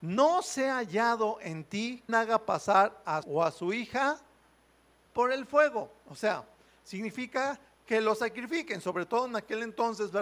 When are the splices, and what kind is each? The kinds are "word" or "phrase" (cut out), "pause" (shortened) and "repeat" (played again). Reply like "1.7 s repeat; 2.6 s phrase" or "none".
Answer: 2.1 s word; 3.2 s phrase

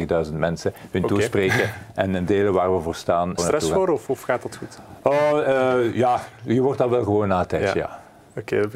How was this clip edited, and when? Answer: 2.3 s word; 3.4 s phrase

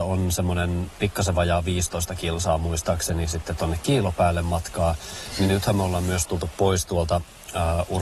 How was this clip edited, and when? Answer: none

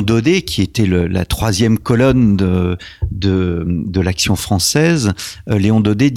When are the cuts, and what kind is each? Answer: none

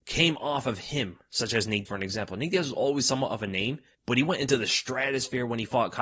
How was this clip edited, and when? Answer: 1.9 s word

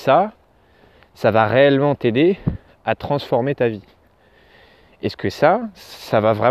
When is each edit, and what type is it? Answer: none

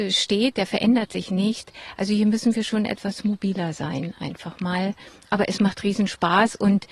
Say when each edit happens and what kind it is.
none

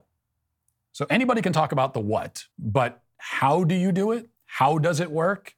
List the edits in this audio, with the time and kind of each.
2.5 s pause; 4.3 s pause

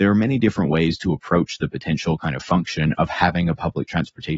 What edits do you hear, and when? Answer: none

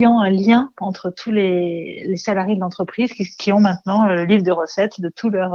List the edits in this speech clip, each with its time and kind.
none

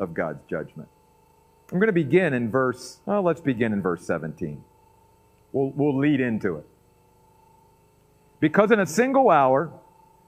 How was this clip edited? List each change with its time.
3.0 s pause

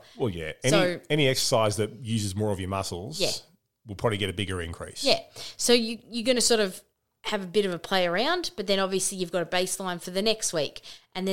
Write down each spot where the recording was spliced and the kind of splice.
none

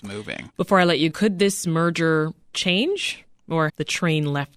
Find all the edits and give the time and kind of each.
1.1 s word; 2.5 s word; 3.7 s word

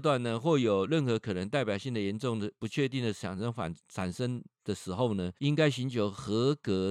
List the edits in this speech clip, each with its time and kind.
3.8 s pause; 5.4 s pause

